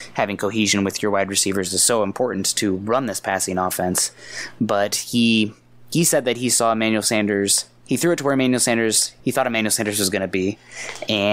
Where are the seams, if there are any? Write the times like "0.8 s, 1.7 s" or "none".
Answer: 9.2 s